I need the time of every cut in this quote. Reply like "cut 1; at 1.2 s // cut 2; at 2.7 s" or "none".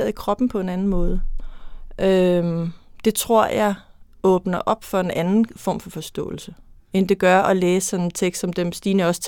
cut 1; at 6.8 s